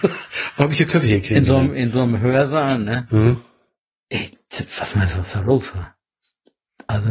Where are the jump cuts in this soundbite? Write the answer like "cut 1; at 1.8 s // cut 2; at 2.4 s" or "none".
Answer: none